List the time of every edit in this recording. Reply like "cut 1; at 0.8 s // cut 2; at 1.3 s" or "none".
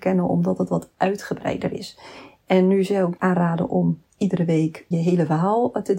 cut 1; at 3.2 s // cut 2; at 4.9 s